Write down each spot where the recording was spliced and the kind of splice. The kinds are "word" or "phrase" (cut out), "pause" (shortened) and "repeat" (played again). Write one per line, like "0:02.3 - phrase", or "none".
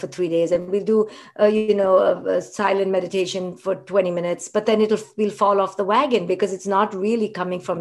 none